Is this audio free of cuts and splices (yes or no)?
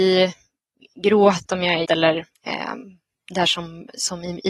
no